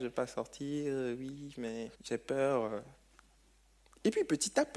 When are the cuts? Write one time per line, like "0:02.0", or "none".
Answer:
0:01.9

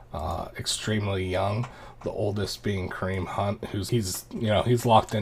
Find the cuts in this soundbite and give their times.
0:03.9

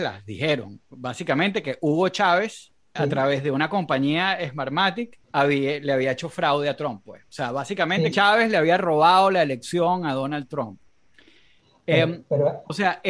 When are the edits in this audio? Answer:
0:03.0
0:05.2
0:08.1

